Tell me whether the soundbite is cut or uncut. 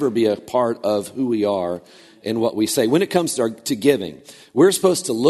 uncut